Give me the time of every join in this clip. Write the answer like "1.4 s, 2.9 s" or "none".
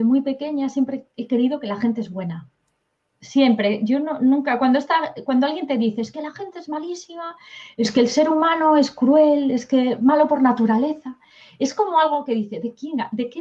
none